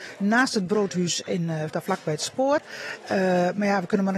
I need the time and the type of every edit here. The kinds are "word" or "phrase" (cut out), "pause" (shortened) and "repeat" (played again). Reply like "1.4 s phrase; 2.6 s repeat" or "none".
1.7 s word